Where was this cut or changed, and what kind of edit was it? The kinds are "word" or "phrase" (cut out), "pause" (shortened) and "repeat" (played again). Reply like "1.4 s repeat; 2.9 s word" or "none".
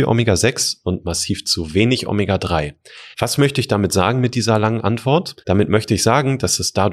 3.1 s pause; 5.4 s pause